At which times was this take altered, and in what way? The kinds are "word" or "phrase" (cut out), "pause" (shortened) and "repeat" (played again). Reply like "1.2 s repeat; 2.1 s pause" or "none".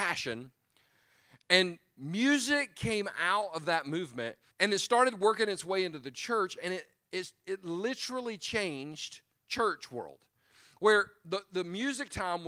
4.5 s pause